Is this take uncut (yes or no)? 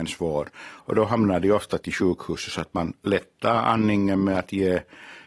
yes